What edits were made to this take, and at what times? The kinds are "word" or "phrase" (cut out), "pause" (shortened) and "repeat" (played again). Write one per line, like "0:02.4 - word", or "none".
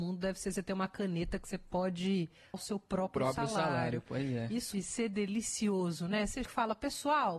0:02.5 - word
0:04.7 - word
0:06.4 - word